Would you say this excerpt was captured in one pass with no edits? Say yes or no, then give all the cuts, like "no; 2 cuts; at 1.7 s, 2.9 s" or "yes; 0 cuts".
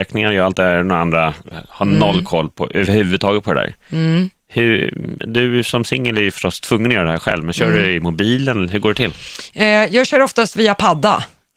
yes; 0 cuts